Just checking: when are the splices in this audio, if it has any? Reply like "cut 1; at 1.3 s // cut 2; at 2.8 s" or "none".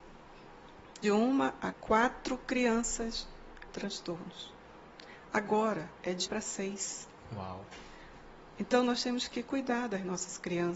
cut 1; at 1.0 s // cut 2; at 1.7 s // cut 3; at 3.7 s // cut 4; at 6.3 s